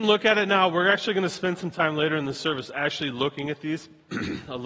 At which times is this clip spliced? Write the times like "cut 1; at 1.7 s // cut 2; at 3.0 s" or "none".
none